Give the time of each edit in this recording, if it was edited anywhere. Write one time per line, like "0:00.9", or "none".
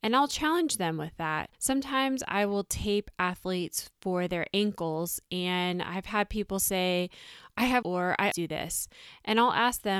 0:01.5
0:07.8
0:08.3